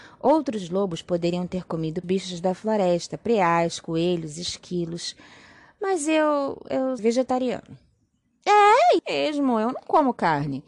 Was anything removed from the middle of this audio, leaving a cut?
yes; 3 cuts; at 2.0 s, 7.0 s, 9.0 s

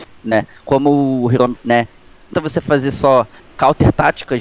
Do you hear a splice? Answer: yes; 3 cuts; at 1.6 s, 2.3 s, 3.5 s

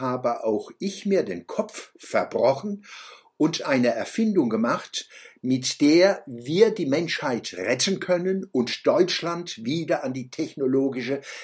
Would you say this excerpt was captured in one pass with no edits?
yes; 0 cuts

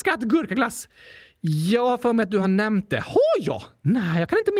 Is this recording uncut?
yes; 0 cuts

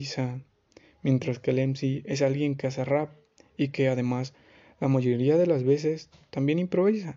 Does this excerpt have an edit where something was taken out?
no; 0 cuts

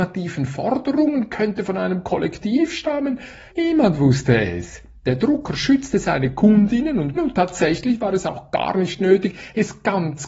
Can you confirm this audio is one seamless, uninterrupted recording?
no; 2 cuts; at 3.5 s, 7.1 s

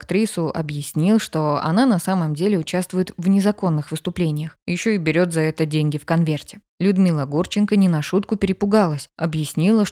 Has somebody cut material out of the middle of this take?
no; 0 cuts

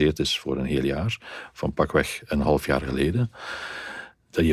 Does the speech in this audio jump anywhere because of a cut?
no; 0 cuts

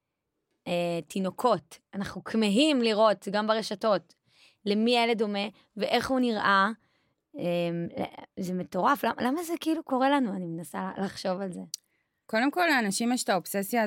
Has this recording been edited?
no; 0 cuts

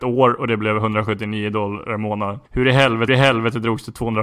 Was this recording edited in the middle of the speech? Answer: yes; 2 cuts; at 2.5 s, 3.1 s

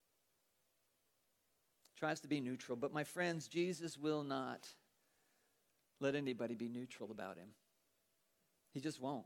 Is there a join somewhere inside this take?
no; 0 cuts

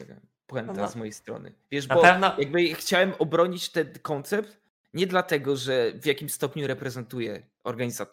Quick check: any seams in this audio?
no; 0 cuts

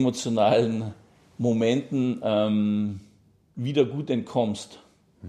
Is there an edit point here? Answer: no; 0 cuts

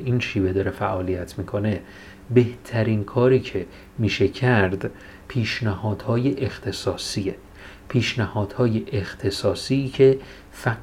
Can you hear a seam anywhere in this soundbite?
yes; 1 cut; at 5.2 s

